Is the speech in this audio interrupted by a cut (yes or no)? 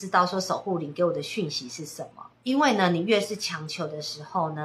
yes